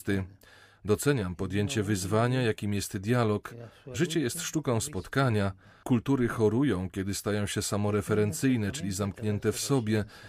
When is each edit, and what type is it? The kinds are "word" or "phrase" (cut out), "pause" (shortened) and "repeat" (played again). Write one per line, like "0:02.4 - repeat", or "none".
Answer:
none